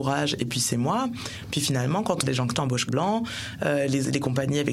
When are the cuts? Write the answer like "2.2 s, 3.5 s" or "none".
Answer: 2.2 s, 2.5 s, 2.9 s